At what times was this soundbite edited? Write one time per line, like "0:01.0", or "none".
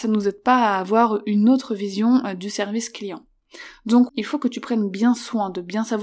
0:04.1